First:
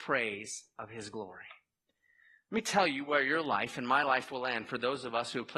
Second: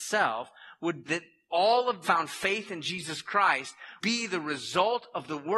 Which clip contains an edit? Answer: second; 3 cuts; at 1.1 s, 2.0 s, 4.0 s

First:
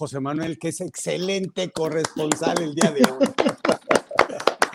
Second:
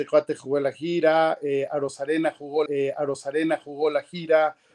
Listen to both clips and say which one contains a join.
second; 1 cut; at 2.7 s

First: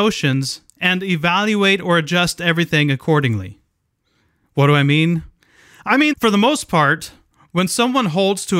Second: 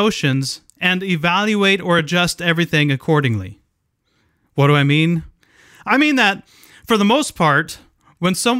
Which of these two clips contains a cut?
first; 1 cut; at 6.1 s

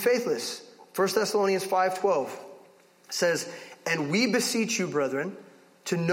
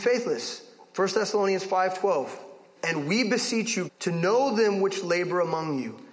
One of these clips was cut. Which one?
second; 2 cuts; at 2.8 s, 3.9 s

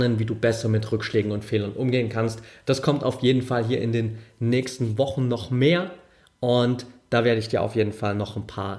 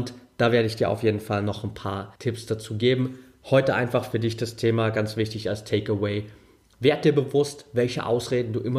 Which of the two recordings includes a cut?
second; 1 cut; at 2.2 s

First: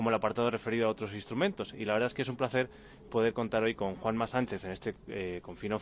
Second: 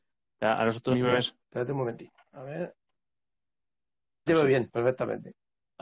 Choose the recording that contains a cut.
second; 3 cuts; at 0.9 s, 1.4 s, 4.3 s

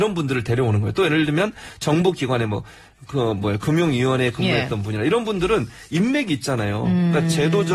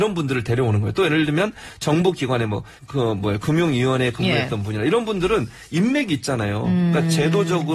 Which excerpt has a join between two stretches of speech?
second; 1 cut; at 2.8 s

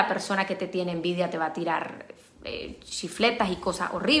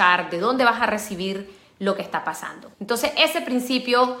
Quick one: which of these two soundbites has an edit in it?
second; 1 cut; at 2.7 s

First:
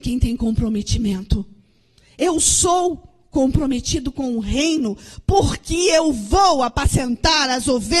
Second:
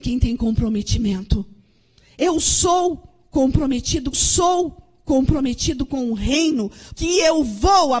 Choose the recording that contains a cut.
second; 2 cuts; at 4.1 s, 7.0 s

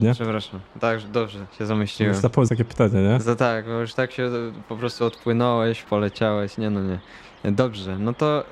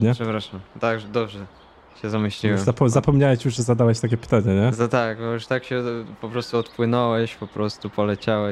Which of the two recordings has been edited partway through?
first; 3 cuts; at 1.5 s, 2.5 s, 5.8 s

